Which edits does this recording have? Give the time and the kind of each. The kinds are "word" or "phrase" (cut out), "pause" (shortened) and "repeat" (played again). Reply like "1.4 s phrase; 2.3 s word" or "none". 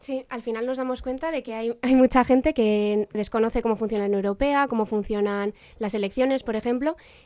none